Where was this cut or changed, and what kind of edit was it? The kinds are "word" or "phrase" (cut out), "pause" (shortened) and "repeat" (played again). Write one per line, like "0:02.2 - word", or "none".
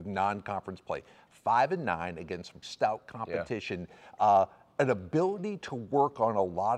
0:02.6 - word